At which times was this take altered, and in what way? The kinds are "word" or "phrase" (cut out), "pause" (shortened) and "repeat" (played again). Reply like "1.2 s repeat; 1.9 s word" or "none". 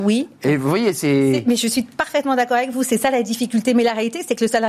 none